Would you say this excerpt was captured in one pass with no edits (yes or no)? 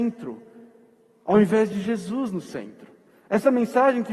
yes